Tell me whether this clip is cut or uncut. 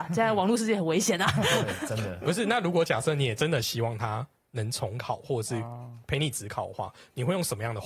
uncut